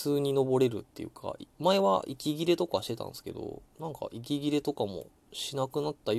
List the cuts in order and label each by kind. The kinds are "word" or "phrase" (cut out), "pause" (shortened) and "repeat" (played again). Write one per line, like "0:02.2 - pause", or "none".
0:03.7 - pause